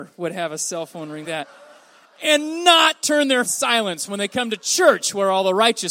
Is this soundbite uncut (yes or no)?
no